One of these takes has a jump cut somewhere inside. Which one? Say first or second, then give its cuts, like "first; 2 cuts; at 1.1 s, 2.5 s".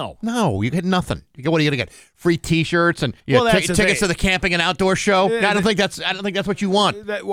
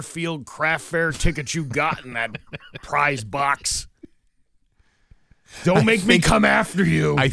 first; 1 cut; at 3.2 s